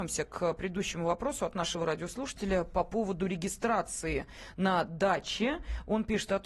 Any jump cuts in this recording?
no; 0 cuts

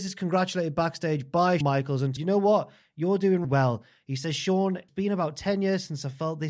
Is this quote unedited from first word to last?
no; 4 cuts; at 1.6 s, 2.2 s, 3.4 s, 4.9 s

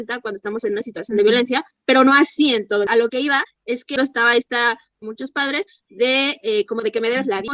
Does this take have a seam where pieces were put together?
no; 0 cuts

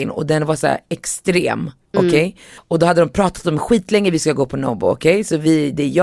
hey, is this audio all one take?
yes; 0 cuts

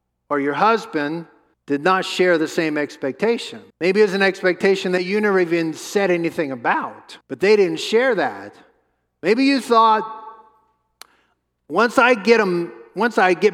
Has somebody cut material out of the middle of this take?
yes; 3 cuts; at 1.5 s, 3.7 s, 7.2 s

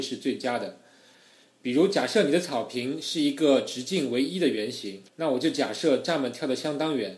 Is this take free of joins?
no; 1 cut; at 5.1 s

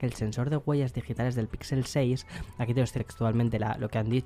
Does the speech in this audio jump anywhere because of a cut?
yes; 1 cut; at 3.0 s

